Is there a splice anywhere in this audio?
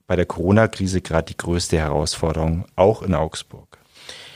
no; 0 cuts

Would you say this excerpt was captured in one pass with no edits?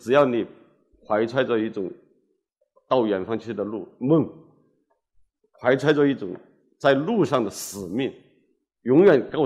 yes; 0 cuts

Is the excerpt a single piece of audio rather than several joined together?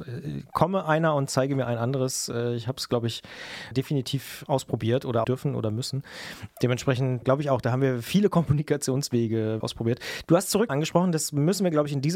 no; 5 cuts; at 3.7 s, 5.2 s, 7.2 s, 9.6 s, 10.7 s

